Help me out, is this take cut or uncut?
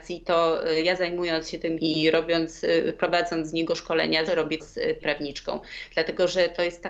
cut